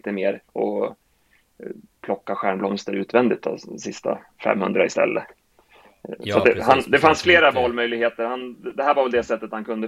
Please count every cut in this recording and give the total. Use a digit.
0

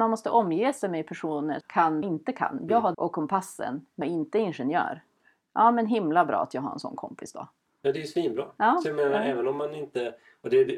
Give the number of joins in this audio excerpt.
4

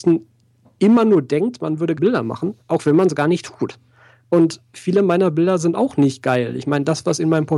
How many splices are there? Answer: 2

